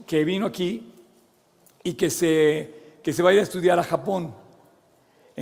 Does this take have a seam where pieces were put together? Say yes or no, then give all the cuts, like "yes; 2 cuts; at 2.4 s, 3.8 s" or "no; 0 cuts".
no; 0 cuts